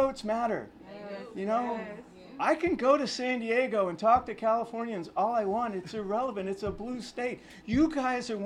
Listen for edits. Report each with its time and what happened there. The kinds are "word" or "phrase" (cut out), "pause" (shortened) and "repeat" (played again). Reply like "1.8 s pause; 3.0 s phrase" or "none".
none